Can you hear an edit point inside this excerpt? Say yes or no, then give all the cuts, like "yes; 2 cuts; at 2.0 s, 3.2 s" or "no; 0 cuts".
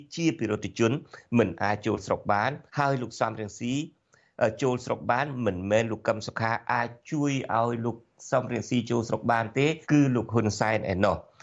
yes; 2 cuts; at 2.7 s, 9.8 s